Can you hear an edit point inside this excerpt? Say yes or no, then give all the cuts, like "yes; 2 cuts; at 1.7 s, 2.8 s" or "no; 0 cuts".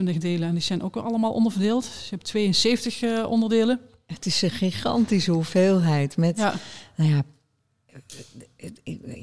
no; 0 cuts